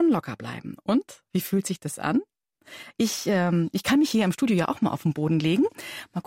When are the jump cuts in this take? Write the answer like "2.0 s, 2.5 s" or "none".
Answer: 1.3 s

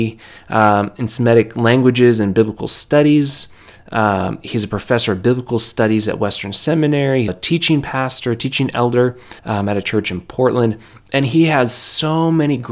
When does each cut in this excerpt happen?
7.3 s, 9.4 s

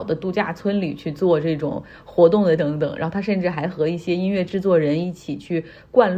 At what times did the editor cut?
2.6 s

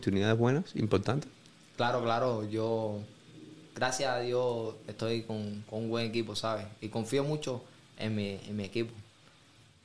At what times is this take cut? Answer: none

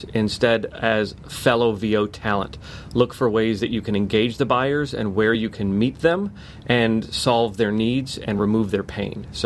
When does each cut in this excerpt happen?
none

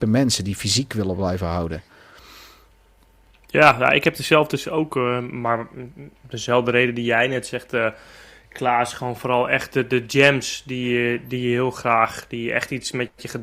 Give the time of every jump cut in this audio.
none

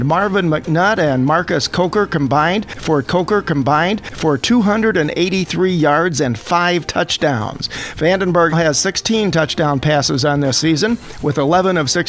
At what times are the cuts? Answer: 3.0 s, 8.5 s

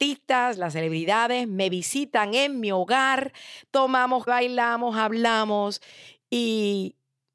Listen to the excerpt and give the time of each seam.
4.3 s

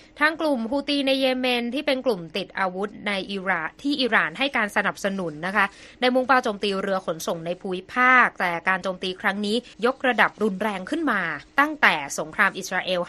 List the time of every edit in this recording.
9.7 s, 11.5 s

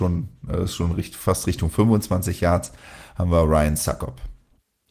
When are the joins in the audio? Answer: none

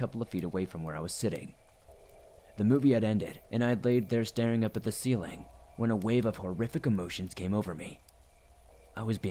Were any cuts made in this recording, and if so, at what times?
3.4 s

